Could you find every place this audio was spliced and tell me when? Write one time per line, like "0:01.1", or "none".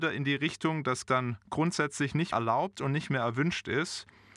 0:01.0
0:02.3